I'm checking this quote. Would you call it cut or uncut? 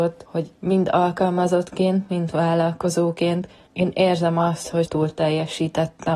cut